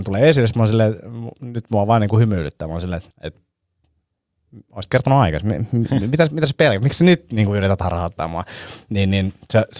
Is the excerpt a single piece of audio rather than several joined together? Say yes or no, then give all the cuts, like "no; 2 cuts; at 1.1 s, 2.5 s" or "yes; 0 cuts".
no; 1 cut; at 3.1 s